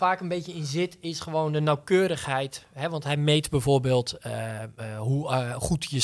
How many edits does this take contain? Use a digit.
0